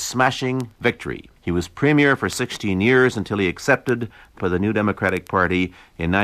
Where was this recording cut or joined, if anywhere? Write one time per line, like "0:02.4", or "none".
0:01.4
0:04.4